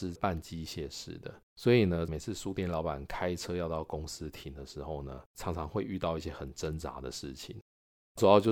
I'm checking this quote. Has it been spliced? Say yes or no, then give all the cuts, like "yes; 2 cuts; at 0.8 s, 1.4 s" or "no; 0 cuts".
yes; 2 cuts; at 1.5 s, 5.3 s